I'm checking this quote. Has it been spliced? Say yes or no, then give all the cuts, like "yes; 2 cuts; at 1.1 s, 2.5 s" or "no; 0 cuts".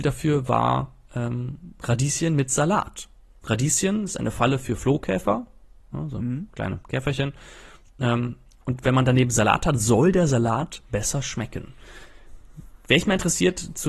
no; 0 cuts